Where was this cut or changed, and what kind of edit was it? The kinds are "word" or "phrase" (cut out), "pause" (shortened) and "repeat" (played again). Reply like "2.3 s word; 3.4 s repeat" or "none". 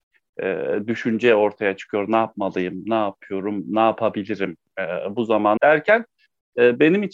5.6 s phrase